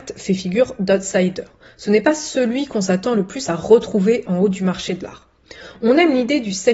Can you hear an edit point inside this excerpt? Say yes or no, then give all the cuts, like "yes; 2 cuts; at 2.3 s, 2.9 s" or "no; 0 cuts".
no; 0 cuts